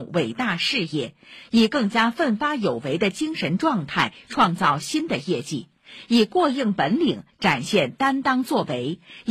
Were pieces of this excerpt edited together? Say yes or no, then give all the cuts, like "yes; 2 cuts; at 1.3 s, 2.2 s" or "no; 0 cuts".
no; 0 cuts